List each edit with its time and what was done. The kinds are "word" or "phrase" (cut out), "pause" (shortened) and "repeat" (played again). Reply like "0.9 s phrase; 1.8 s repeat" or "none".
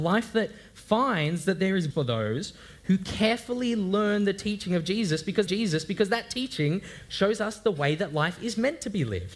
1.9 s phrase; 5.5 s repeat